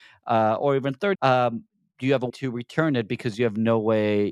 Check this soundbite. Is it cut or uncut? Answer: cut